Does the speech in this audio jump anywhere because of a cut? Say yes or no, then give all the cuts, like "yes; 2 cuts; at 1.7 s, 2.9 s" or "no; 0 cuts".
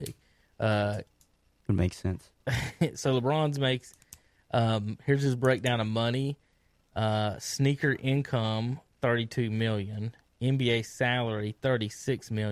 no; 0 cuts